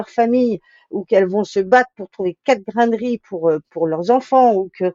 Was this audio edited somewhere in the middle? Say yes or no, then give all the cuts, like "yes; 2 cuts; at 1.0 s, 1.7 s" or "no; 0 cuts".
yes; 1 cut; at 3.6 s